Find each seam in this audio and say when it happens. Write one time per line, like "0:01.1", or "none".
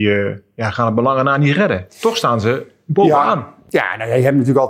none